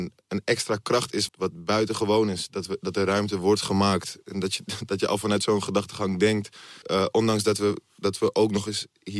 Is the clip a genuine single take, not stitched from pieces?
no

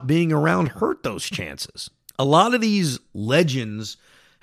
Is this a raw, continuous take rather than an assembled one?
no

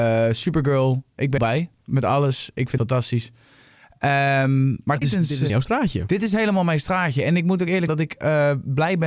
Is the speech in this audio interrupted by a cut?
yes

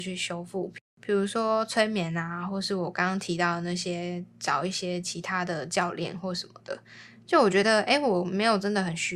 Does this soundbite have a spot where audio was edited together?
no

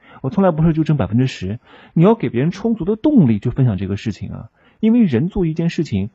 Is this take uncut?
yes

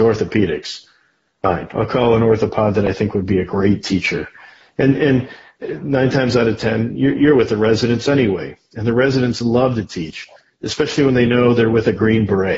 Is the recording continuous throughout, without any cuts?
yes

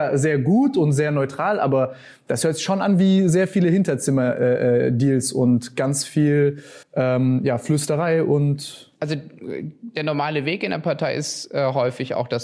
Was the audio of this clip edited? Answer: yes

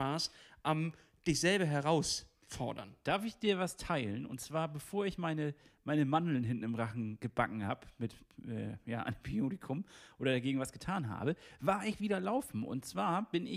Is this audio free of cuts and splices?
yes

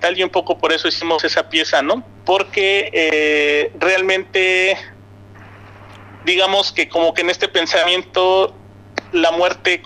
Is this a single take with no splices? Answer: no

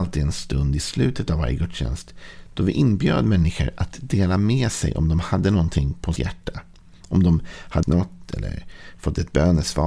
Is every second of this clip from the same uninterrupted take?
no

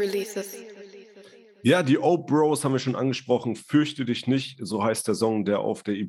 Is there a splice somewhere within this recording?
no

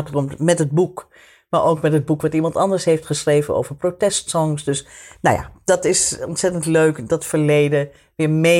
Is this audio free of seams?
yes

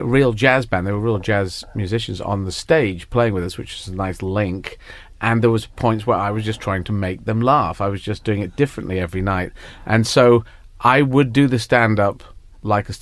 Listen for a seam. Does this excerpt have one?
no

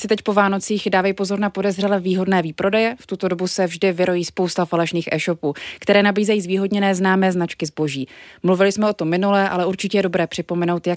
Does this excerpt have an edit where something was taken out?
no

